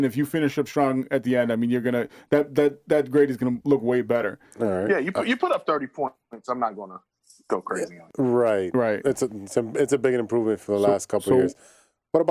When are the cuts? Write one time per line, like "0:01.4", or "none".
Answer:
none

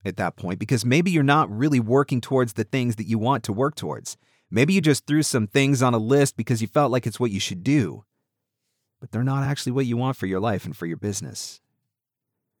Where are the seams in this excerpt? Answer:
none

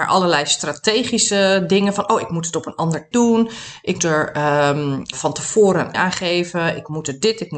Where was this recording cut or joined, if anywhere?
0:03.1
0:04.0
0:05.1
0:05.9

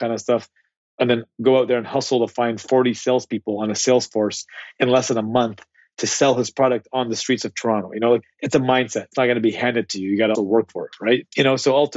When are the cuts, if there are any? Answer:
0:10.3

